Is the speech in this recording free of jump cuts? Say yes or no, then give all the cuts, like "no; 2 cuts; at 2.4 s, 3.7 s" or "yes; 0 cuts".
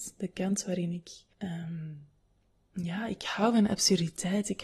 no; 1 cut; at 1.3 s